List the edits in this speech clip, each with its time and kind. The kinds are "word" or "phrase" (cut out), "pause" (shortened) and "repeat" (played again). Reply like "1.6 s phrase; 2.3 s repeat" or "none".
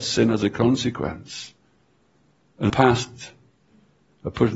2.7 s word